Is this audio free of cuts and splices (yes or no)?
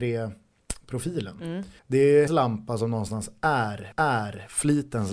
no